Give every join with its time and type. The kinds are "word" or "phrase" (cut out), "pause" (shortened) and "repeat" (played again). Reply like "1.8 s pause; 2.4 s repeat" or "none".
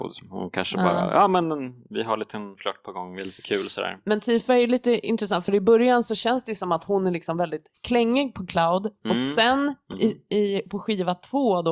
none